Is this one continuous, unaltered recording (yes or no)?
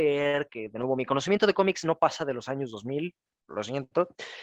yes